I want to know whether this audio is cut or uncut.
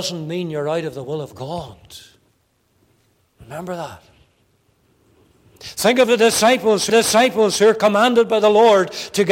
cut